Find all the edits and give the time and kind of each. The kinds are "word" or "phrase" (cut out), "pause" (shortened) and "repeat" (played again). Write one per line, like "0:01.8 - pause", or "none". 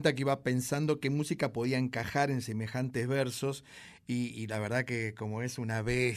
none